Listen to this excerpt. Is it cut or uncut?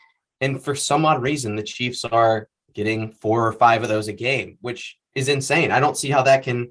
cut